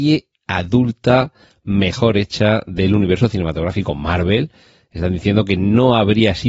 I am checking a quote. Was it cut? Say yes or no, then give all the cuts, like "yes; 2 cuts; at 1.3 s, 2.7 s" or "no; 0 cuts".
no; 0 cuts